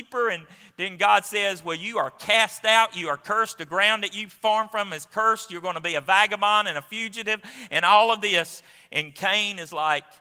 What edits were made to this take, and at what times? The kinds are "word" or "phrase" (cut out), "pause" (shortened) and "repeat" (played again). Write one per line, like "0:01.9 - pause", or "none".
none